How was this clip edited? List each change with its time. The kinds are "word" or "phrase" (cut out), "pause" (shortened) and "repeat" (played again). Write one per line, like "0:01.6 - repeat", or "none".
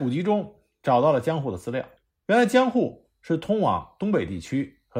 0:02.0 - pause